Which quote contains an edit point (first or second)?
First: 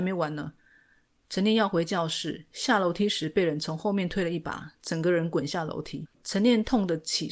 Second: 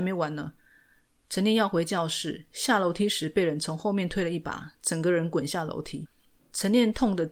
first